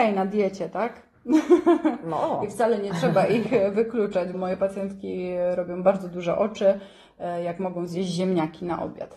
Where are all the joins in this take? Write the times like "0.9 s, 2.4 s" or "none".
4.3 s

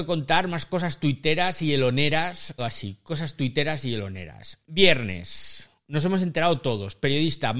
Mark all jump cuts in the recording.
2.6 s, 4.6 s

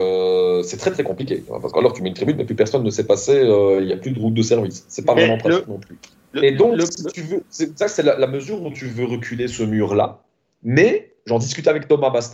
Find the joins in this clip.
none

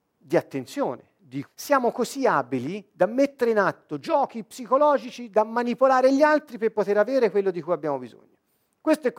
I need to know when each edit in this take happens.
1.4 s

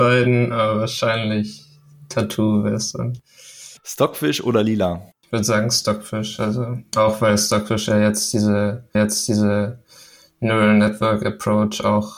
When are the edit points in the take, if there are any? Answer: 3.8 s, 5.1 s, 8.9 s

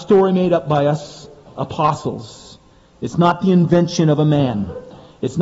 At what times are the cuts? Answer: none

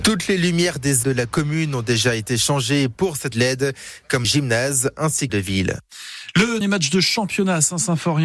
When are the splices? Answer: 1.0 s, 3.3 s, 4.2 s, 5.3 s, 6.6 s

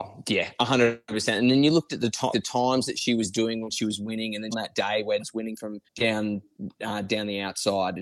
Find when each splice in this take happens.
2.3 s, 4.5 s, 5.2 s, 5.9 s

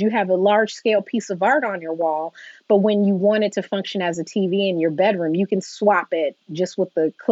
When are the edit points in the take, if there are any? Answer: 6.4 s

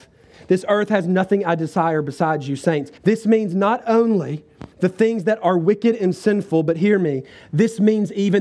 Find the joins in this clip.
3.0 s, 4.7 s

